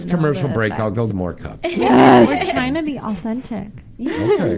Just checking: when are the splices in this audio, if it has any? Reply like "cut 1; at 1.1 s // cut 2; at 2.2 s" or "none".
cut 1; at 1.1 s